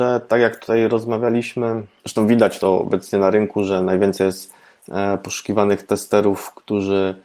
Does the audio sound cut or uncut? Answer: uncut